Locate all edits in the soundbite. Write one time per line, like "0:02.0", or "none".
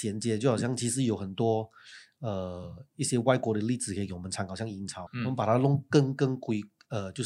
0:05.1